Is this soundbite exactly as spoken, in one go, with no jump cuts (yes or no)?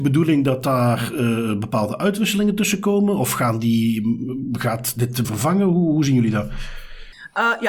no